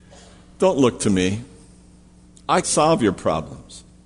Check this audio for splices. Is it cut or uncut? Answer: cut